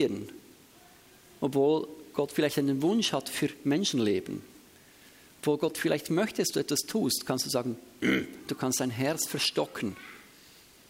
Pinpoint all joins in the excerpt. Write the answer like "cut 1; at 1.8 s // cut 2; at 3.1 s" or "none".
none